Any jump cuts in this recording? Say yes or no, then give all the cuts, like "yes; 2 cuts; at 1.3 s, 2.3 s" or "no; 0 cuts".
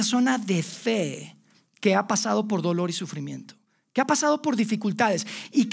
no; 0 cuts